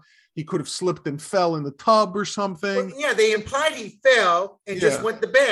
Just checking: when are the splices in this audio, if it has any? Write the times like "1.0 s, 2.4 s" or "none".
none